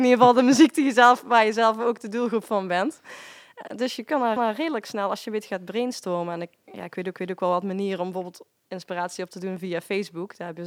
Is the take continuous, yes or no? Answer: no